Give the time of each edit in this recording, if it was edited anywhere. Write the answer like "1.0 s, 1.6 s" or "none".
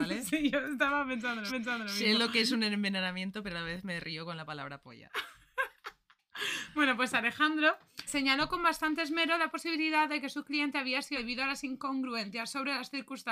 1.5 s, 8.1 s, 11.2 s